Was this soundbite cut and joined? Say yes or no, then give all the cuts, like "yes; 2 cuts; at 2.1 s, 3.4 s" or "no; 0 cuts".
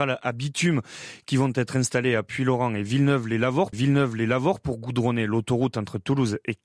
yes; 1 cut; at 3.7 s